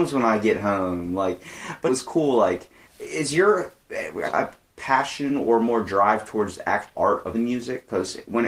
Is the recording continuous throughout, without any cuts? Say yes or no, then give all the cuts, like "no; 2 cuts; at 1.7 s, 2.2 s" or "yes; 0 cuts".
no; 5 cuts; at 1.9 s, 2.8 s, 4.2 s, 6.9 s, 7.3 s